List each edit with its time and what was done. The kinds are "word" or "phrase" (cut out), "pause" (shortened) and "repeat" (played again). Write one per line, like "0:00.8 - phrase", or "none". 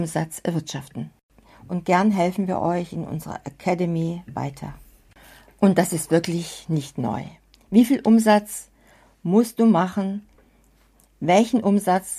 none

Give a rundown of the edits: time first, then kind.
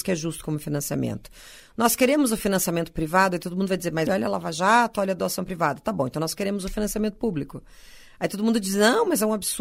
0:04.1 - word

